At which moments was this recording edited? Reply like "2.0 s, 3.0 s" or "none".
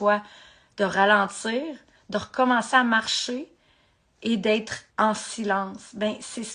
4.9 s